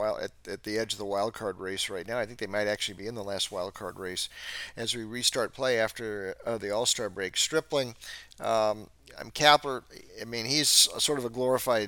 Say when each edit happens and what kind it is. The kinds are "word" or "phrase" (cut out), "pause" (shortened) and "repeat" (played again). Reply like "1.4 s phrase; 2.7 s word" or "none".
10.1 s pause

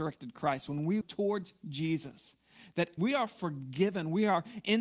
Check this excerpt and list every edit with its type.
1.0 s word; 3.0 s word

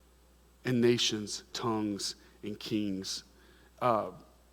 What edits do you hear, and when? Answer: 1.5 s word

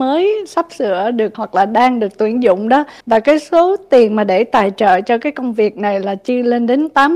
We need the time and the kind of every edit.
1.3 s word; 3.0 s pause

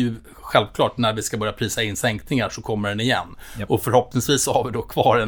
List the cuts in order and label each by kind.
none

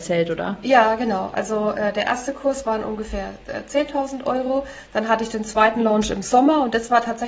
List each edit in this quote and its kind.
none

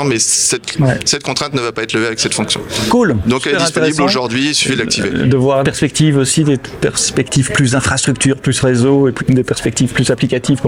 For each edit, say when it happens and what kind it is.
5.6 s phrase; 9.2 s word

